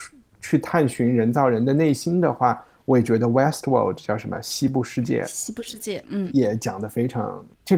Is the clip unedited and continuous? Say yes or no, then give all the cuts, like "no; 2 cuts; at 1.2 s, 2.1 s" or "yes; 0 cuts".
yes; 0 cuts